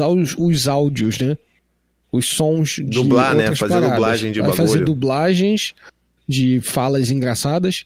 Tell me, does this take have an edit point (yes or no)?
no